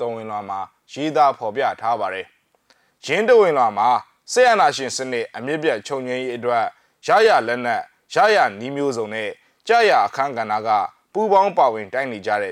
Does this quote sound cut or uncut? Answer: uncut